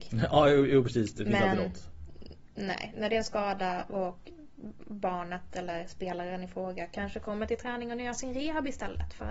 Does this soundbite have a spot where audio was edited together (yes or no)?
no